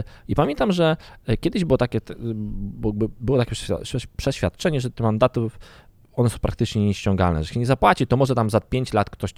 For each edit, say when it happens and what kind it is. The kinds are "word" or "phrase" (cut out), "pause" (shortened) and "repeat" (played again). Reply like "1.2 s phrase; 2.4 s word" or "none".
none